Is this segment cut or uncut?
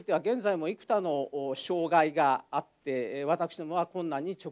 uncut